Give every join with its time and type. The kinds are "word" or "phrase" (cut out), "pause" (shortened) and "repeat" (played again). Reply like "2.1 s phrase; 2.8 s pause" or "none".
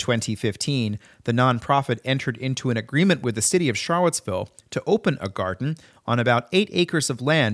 none